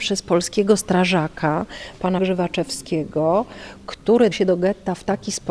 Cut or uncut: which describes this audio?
cut